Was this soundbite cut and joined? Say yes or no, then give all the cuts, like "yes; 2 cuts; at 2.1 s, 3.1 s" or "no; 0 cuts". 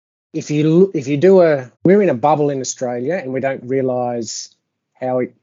yes; 2 cuts; at 1.7 s, 3.6 s